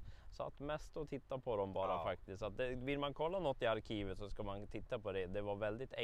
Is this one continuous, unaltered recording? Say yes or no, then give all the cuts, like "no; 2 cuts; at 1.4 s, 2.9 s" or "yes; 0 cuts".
yes; 0 cuts